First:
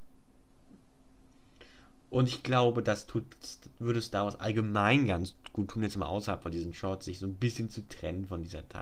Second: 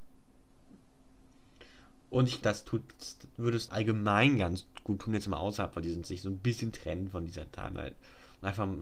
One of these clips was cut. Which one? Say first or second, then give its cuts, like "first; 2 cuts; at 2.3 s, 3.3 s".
second; 4 cuts; at 2.4 s, 3.7 s, 6.0 s, 6.7 s